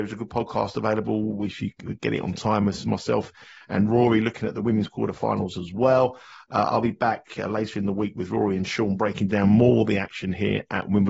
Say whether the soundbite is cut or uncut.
uncut